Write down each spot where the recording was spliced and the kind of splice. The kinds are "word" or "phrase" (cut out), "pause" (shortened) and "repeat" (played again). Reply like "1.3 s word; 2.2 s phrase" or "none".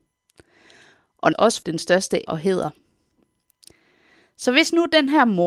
1.3 s word; 1.6 s word; 2.3 s word